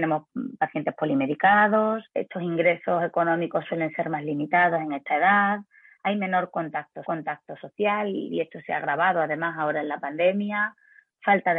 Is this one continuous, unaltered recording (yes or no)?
no